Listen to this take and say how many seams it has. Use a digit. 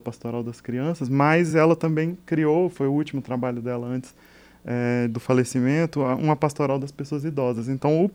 0